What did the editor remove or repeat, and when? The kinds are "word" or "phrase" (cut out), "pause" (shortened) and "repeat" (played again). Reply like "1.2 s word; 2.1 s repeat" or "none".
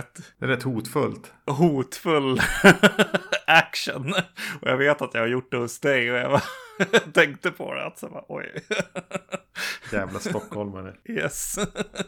none